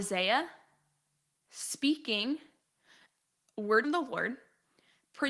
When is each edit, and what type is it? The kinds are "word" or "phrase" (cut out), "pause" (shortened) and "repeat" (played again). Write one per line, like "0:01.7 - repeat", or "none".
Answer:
0:03.8 - word

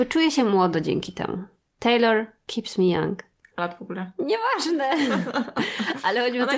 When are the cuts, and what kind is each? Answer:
0:03.6 - phrase

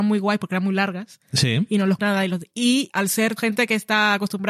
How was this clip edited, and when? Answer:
0:02.0 - word
0:02.9 - word
0:03.4 - word

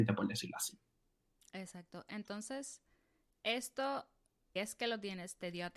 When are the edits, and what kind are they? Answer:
0:04.6 - word

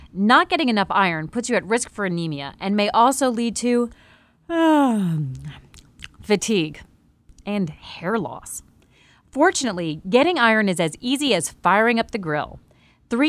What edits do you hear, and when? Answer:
none

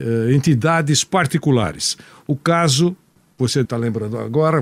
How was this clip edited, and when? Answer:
0:03.6 - word

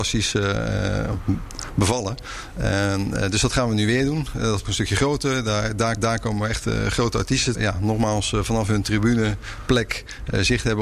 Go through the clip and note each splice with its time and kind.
0:04.6 - phrase
0:06.0 - repeat
0:07.5 - phrase

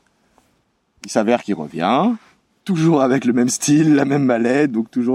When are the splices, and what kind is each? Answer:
none

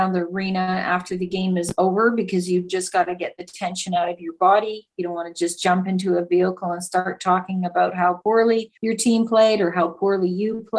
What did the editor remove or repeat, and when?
0:08.8 - pause

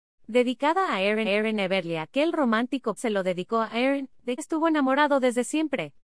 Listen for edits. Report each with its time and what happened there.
0:01.2 - repeat
0:03.0 - word
0:04.4 - word

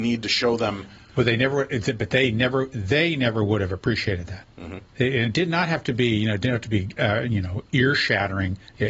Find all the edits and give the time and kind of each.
none

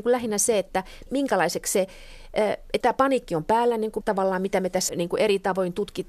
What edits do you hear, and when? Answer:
0:01.1 - word
0:02.8 - word
0:04.0 - word
0:04.9 - word

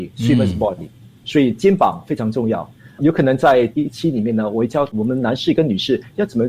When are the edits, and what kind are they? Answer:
none

